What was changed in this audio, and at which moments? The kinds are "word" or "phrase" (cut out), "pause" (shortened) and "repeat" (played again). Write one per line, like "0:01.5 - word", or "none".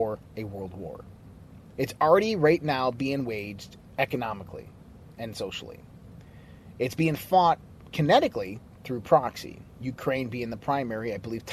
none